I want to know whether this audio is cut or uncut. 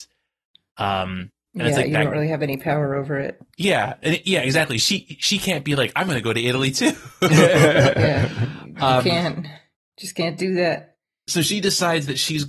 uncut